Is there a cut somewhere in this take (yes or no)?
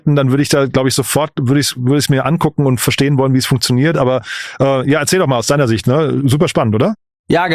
no